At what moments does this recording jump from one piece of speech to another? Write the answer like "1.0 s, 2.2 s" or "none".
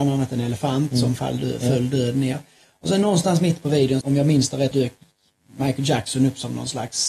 4.0 s, 4.7 s